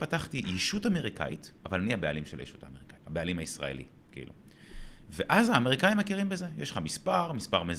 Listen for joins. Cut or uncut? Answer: cut